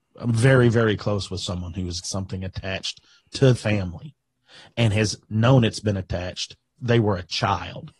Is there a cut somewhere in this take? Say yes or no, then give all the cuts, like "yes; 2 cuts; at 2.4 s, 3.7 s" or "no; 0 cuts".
yes; 3 cuts; at 2.0 s, 3.5 s, 6.8 s